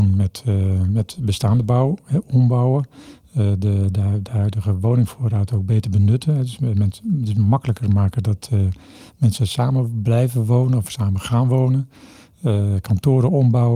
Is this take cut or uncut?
uncut